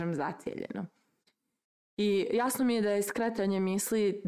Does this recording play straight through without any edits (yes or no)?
yes